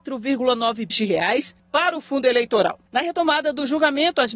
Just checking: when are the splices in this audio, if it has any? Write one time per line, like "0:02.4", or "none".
0:00.9
0:01.6
0:02.9